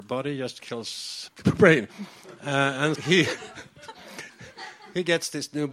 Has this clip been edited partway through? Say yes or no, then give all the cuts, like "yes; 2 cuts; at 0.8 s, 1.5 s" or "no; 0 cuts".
yes; 2 cuts; at 1.3 s, 2.9 s